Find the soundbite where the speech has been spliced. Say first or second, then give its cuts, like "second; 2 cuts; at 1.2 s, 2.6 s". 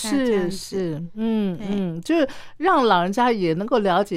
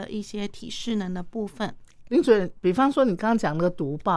second; 1 cut; at 2.1 s